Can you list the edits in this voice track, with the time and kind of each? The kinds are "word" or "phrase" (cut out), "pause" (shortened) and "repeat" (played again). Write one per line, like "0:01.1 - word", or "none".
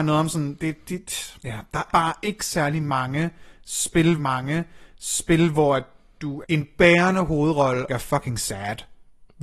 0:01.4 - pause
0:01.9 - word
0:04.2 - repeat
0:06.4 - word
0:07.9 - phrase